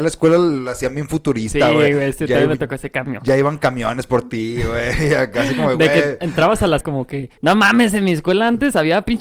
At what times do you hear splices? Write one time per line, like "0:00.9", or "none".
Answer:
0:06.8
0:07.4